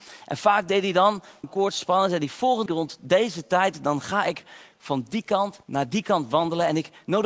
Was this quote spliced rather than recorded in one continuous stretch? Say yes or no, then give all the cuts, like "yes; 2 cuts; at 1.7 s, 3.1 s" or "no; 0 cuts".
yes; 3 cuts; at 1.4 s, 2.7 s, 5.6 s